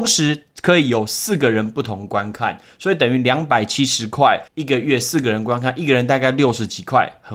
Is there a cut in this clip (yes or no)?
yes